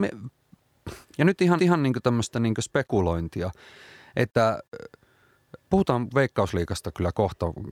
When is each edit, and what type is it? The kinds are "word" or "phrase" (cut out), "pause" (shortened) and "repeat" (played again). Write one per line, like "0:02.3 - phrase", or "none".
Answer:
0:01.0 - phrase
0:01.6 - repeat
0:05.6 - pause